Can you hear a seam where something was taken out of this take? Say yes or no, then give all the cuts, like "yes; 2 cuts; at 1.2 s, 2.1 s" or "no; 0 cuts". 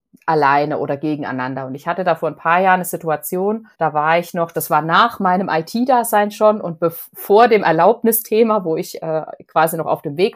yes; 1 cut; at 3.7 s